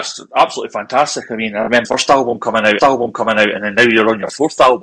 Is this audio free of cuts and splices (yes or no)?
no